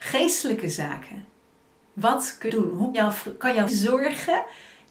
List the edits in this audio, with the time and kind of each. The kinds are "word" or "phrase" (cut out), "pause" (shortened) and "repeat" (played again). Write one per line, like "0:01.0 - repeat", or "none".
0:02.5 - word
0:02.9 - word
0:03.7 - word